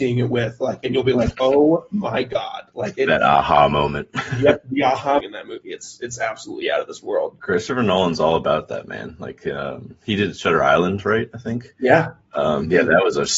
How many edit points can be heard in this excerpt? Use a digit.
2